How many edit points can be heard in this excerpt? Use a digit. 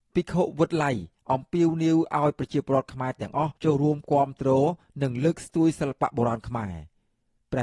1